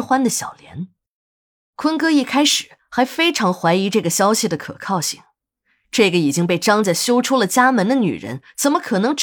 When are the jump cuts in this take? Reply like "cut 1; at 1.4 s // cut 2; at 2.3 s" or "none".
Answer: none